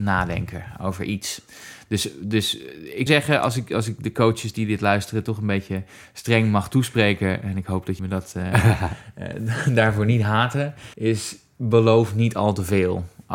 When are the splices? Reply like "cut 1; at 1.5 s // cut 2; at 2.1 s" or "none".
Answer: cut 1; at 3.1 s // cut 2; at 8.0 s // cut 3; at 10.9 s